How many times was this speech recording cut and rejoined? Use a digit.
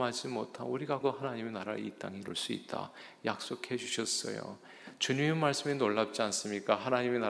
1